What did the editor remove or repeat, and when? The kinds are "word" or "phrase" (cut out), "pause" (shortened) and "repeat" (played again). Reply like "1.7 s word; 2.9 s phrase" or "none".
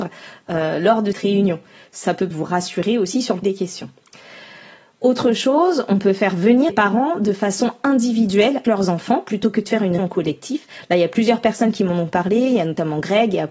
1.1 s word; 2.3 s word; 3.4 s word; 6.7 s word; 8.6 s word; 10.0 s word

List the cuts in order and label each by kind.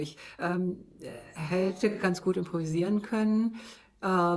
none

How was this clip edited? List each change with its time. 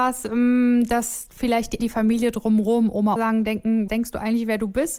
1.8 s word; 3.2 s word; 3.9 s word

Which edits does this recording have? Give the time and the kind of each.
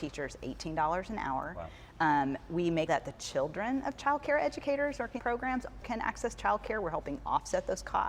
2.9 s word; 5.2 s word; 5.8 s word

